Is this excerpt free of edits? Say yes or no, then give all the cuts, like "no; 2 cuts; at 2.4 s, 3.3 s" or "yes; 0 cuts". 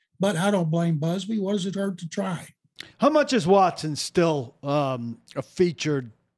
no; 1 cut; at 2.9 s